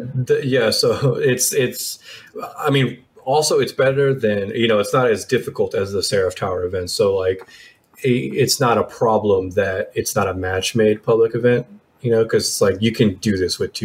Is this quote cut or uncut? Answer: uncut